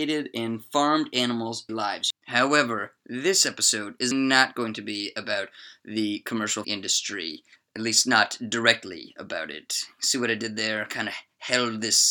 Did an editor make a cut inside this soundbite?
yes; 4 cuts; at 1.7 s, 4.1 s, 6.6 s, 7.6 s

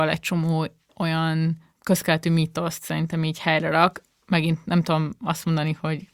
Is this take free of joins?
yes; 0 cuts

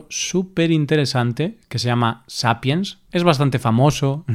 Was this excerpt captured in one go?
no; 1 cut; at 3.1 s

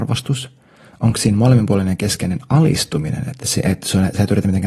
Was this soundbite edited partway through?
no; 0 cuts

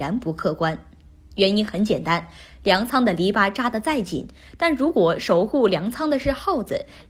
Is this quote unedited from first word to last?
yes; 0 cuts

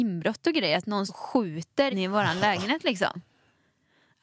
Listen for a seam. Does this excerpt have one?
yes; 2 cuts; at 1.1 s, 1.9 s

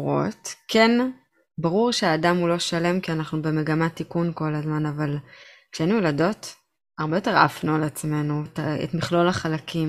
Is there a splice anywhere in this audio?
yes; 1 cut; at 8.5 s

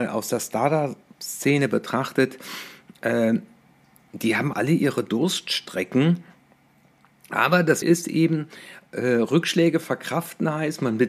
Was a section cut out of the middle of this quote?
yes; 2 cuts; at 4.5 s, 7.8 s

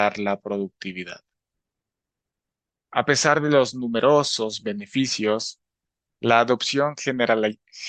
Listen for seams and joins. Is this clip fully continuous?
yes; 0 cuts

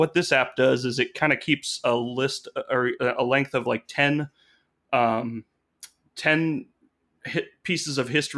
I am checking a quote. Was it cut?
no; 0 cuts

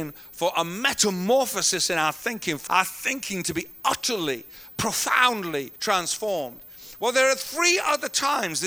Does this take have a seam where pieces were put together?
yes; 2 cuts; at 2.7 s, 5.8 s

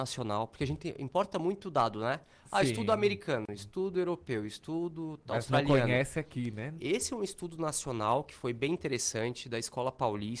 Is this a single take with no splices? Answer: yes; 0 cuts

